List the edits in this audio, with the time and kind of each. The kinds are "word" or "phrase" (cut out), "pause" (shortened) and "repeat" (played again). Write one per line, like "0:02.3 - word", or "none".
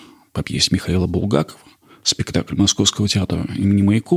none